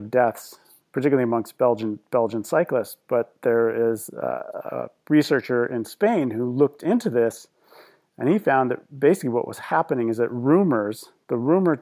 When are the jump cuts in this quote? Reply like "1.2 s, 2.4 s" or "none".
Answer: none